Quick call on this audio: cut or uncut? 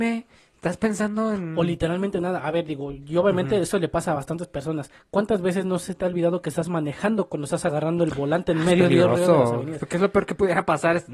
uncut